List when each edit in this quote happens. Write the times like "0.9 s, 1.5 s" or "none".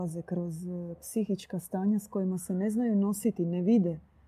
none